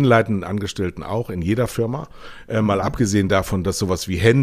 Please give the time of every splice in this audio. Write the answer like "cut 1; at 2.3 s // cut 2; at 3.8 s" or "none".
none

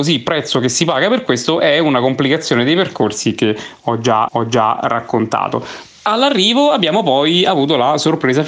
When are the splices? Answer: cut 1; at 4.3 s

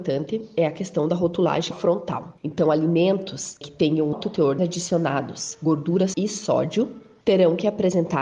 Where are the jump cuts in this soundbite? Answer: cut 1; at 1.7 s // cut 2; at 4.1 s // cut 3; at 4.6 s // cut 4; at 6.1 s

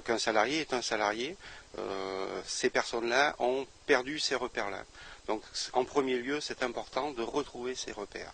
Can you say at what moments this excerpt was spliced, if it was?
none

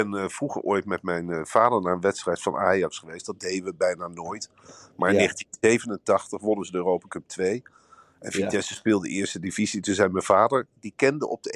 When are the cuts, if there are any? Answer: none

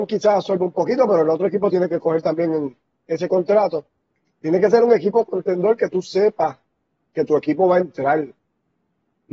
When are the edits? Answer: none

